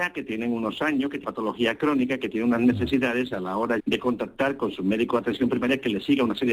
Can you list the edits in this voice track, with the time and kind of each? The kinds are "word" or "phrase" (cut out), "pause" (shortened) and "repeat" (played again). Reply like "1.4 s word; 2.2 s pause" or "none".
1.2 s word; 3.8 s word